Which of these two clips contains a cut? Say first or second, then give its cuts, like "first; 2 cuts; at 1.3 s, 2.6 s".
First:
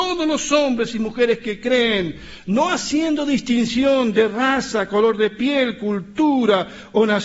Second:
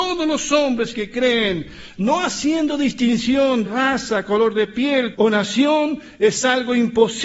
second; 3 cuts; at 0.9 s, 3.7 s, 5.1 s